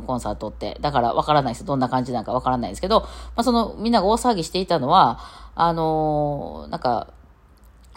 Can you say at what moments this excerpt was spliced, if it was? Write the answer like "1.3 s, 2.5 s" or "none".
none